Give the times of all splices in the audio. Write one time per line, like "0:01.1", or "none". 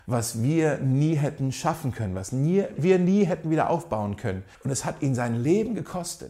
0:02.8
0:04.5